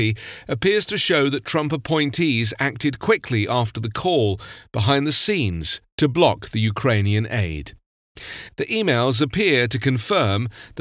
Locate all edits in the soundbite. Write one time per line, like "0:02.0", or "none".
none

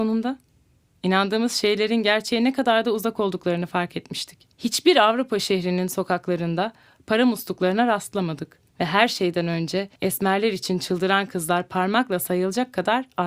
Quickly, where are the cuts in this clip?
0:04.5
0:08.7
0:10.0

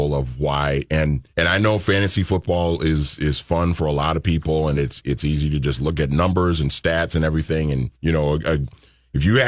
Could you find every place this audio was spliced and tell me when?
0:01.3
0:04.8
0:07.9

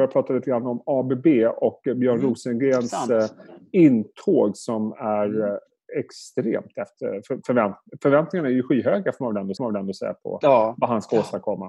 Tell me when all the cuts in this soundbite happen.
0:09.6

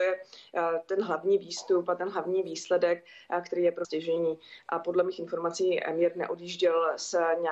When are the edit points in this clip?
0:03.8
0:05.8

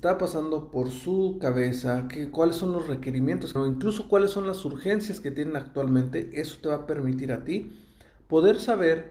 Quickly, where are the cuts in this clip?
0:03.6

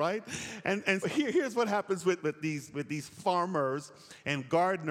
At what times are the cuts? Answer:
0:01.0
0:02.2

